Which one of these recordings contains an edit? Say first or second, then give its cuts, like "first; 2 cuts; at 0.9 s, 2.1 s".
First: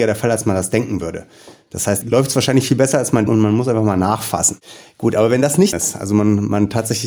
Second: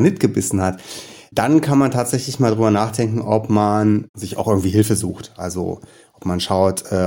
first; 3 cuts; at 2.0 s, 3.3 s, 5.7 s